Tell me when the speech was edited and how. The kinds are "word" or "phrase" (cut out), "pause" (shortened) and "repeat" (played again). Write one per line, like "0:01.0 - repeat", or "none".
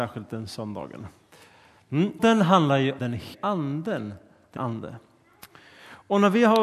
0:02.2 - word
0:03.0 - word
0:03.3 - word
0:04.6 - word